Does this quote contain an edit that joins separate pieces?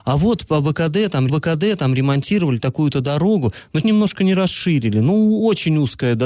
yes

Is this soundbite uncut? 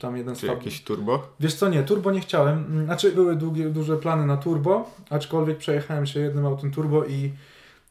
no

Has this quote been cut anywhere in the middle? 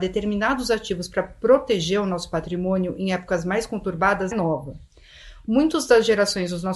yes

